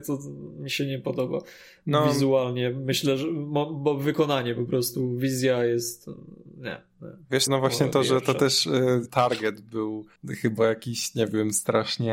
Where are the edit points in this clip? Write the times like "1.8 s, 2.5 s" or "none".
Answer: 7.5 s, 9.1 s, 10.2 s

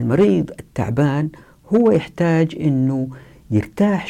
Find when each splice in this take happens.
none

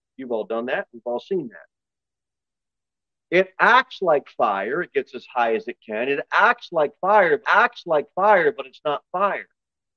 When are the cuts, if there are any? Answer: 7.4 s

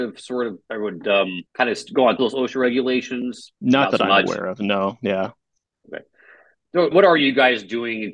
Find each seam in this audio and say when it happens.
1.5 s, 2.2 s, 3.6 s, 5.6 s, 6.9 s

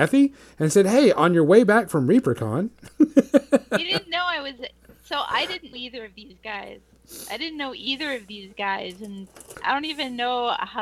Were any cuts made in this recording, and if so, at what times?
5.7 s, 9.5 s

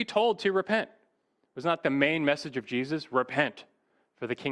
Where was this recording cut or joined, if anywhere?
none

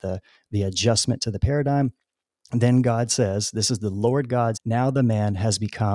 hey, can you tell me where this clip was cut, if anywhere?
4.5 s

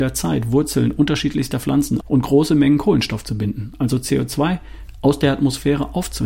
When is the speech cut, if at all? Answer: 2.0 s

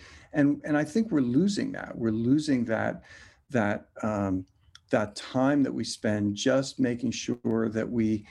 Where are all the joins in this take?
none

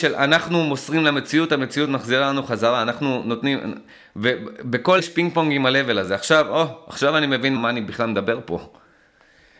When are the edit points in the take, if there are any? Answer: 5.0 s, 7.6 s

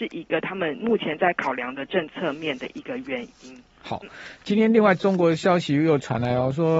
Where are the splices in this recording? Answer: none

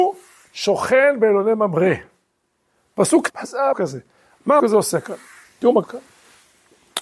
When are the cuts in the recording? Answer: 3.3 s, 3.7 s, 4.6 s, 5.8 s

